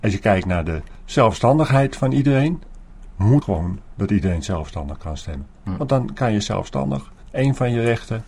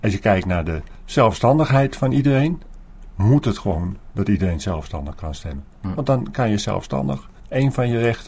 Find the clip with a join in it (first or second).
first